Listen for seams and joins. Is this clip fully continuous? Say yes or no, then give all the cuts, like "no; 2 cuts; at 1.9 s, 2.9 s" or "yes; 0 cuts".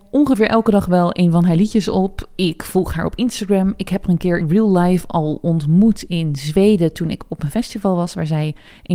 no; 1 cut; at 4.4 s